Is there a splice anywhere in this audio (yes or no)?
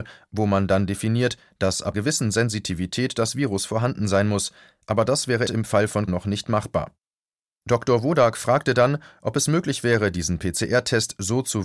yes